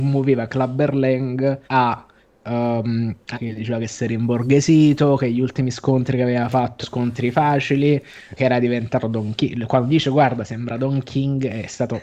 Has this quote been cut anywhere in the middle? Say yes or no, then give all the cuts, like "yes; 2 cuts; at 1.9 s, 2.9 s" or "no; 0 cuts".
yes; 4 cuts; at 1.6 s, 3.3 s, 6.8 s, 8.4 s